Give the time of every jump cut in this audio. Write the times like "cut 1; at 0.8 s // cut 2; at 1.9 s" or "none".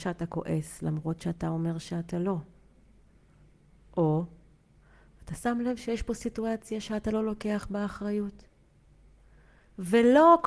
none

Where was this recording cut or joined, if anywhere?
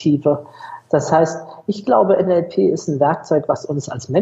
none

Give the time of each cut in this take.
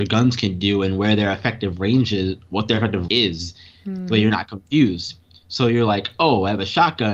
cut 1; at 3.1 s

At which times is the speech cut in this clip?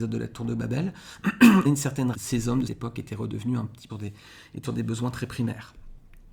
cut 1; at 1.6 s // cut 2; at 2.1 s // cut 3; at 2.7 s // cut 4; at 3.9 s // cut 5; at 4.6 s

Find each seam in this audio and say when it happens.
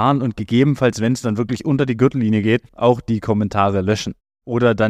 cut 1; at 2.7 s

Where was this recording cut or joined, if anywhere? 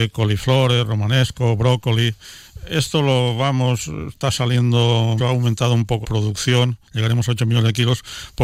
cut 1; at 5.2 s // cut 2; at 6.0 s

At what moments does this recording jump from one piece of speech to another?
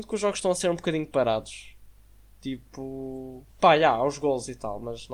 cut 1; at 3.5 s

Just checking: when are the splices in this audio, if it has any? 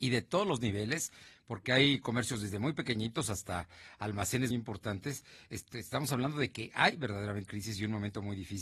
cut 1; at 4.5 s // cut 2; at 7.5 s

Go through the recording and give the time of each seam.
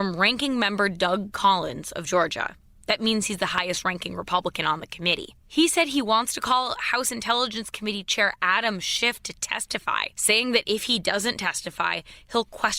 cut 1; at 5.4 s // cut 2; at 10.1 s

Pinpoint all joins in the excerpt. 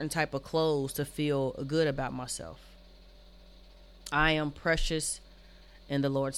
none

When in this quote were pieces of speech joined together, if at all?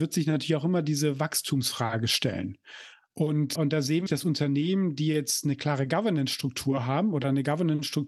cut 1; at 3.5 s // cut 2; at 4.1 s

